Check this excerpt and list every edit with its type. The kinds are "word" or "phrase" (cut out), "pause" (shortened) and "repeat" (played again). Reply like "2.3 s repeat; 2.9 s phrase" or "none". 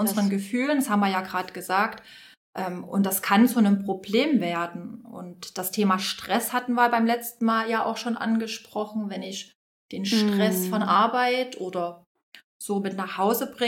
none